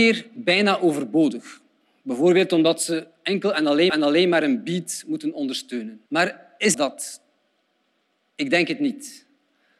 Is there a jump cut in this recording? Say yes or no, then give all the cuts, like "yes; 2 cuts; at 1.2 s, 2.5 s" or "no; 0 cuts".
yes; 3 cuts; at 3.9 s, 6.1 s, 6.7 s